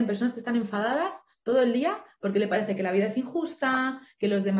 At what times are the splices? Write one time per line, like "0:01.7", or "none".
none